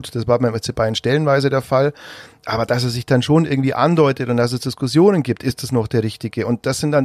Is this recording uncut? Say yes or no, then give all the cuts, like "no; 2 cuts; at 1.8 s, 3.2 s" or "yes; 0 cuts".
yes; 0 cuts